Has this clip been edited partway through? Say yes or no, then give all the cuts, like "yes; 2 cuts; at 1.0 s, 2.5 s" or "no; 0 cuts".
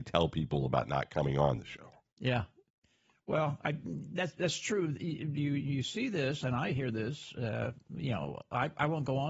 yes; 1 cut; at 2.1 s